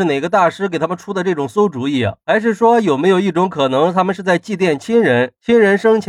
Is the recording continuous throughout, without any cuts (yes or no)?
yes